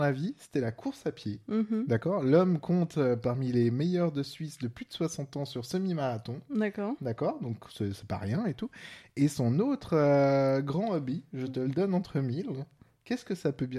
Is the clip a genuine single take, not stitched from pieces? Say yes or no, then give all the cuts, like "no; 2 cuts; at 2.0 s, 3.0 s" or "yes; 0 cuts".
yes; 0 cuts